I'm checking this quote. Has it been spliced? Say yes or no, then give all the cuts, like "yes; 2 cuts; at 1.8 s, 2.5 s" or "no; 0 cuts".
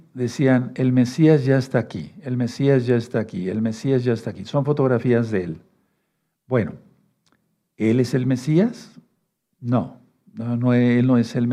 no; 0 cuts